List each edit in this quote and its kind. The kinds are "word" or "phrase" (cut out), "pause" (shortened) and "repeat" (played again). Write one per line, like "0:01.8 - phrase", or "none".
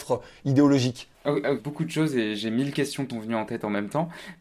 0:01.1 - pause
0:01.6 - phrase
0:03.1 - word